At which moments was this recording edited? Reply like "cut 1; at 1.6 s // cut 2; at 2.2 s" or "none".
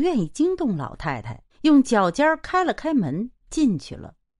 cut 1; at 1.5 s // cut 2; at 3.4 s